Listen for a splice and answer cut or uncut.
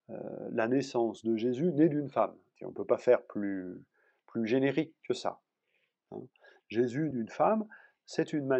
cut